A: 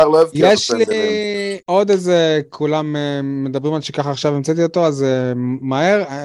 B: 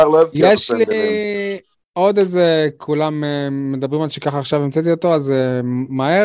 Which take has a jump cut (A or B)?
A